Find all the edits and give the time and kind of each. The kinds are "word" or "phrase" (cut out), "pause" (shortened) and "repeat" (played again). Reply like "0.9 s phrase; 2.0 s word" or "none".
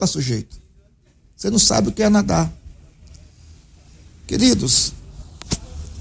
none